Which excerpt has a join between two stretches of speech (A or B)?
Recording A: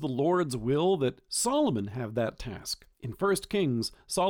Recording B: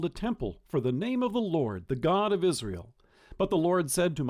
A